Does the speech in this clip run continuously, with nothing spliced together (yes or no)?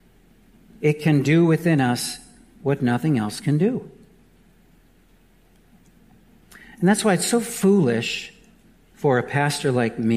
yes